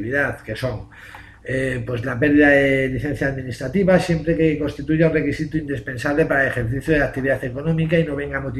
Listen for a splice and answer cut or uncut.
uncut